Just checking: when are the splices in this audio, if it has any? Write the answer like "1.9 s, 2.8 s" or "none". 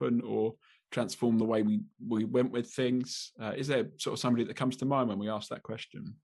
none